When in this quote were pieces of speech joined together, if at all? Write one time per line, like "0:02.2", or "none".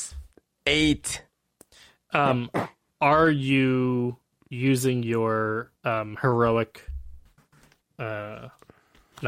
none